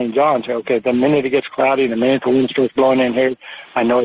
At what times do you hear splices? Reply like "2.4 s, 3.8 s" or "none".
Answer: none